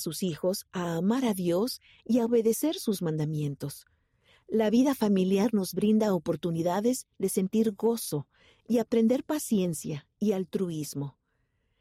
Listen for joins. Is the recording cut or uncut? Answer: uncut